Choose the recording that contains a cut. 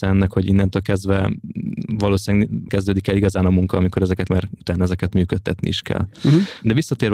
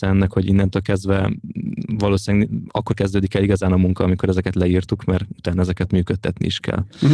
first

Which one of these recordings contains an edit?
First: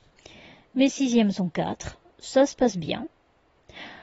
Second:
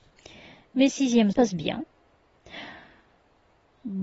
second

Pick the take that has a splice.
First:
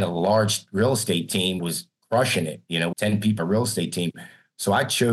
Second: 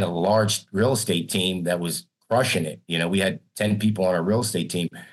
first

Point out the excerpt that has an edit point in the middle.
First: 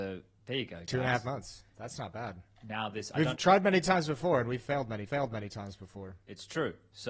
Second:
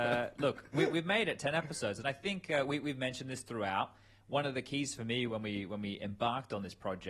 first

